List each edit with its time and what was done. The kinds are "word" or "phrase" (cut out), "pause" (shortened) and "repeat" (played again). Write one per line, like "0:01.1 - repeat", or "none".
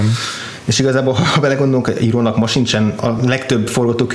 none